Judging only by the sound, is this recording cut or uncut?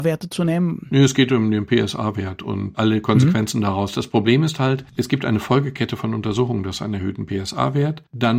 uncut